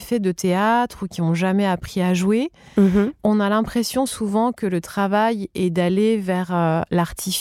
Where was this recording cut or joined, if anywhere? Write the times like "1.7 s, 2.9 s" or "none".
none